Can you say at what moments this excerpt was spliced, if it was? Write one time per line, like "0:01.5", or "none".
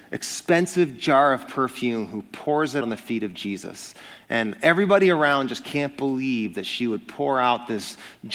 0:02.8